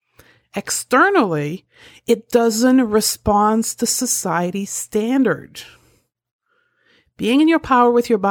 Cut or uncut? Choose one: uncut